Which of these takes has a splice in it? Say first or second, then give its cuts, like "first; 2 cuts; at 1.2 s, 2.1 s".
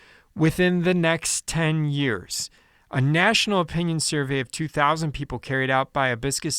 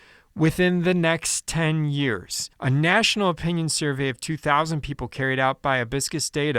second; 1 cut; at 2.5 s